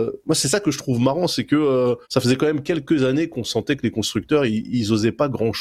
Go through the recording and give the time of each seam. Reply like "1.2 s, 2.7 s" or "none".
2.0 s